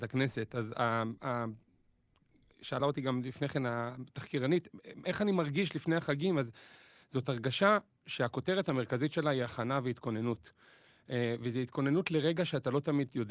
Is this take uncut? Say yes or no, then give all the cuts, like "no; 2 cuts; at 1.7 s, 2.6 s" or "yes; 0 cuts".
yes; 0 cuts